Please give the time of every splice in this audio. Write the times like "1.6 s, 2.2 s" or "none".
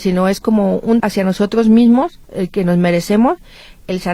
1.0 s, 2.2 s